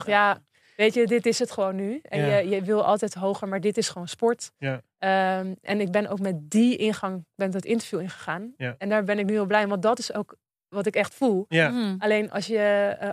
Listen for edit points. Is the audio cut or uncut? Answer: uncut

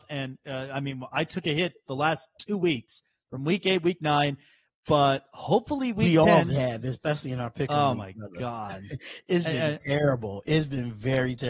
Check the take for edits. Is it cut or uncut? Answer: uncut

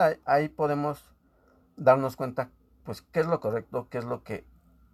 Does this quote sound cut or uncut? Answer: uncut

